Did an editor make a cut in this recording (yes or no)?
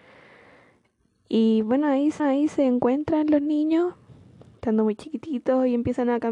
yes